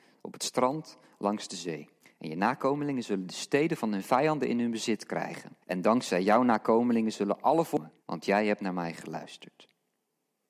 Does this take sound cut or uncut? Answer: cut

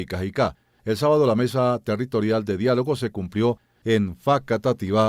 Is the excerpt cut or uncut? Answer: uncut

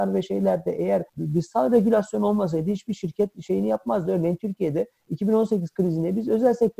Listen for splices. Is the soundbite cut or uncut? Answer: cut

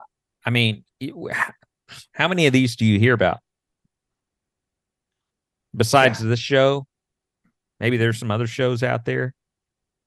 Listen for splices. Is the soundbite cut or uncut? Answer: cut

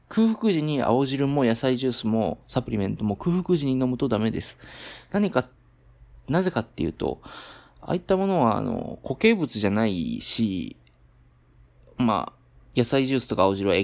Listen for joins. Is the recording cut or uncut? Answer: uncut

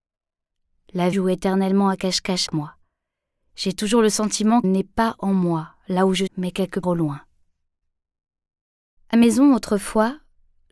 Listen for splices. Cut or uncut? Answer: cut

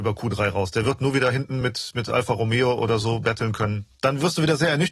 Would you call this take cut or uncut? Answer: uncut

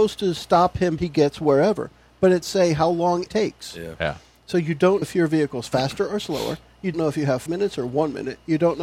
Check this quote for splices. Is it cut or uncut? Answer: cut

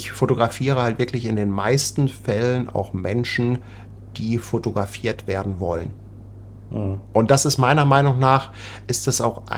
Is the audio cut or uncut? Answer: uncut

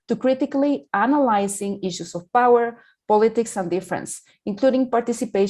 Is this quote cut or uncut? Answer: uncut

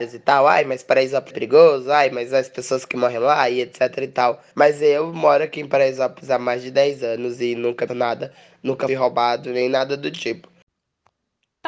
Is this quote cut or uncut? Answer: cut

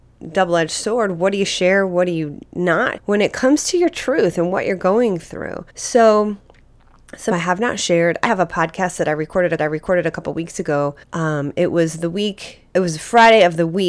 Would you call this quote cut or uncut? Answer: cut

